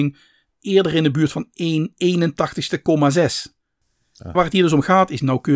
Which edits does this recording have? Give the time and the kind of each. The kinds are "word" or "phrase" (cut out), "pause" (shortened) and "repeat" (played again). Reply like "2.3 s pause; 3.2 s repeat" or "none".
4.3 s word